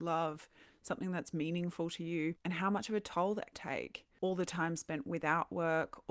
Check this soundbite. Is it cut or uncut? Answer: cut